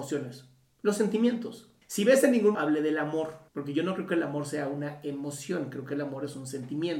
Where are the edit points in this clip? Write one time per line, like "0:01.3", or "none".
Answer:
0:01.8
0:02.5
0:03.5

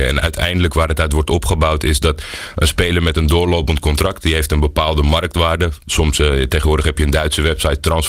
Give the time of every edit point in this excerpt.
none

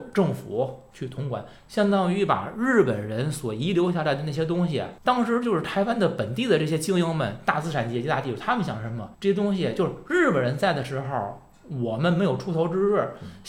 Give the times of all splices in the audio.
0:05.0
0:09.1

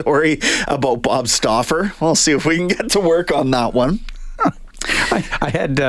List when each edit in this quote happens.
none

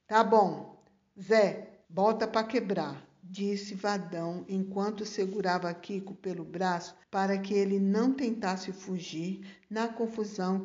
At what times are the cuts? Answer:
0:01.8
0:07.0

